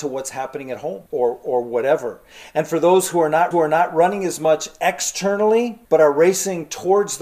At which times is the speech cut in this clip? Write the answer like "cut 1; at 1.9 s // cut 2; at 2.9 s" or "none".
cut 1; at 1.1 s // cut 2; at 3.5 s // cut 3; at 5.8 s